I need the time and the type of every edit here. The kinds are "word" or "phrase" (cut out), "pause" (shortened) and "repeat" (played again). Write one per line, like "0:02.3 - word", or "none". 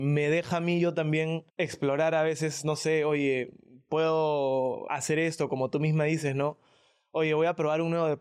0:01.5 - pause
0:04.9 - word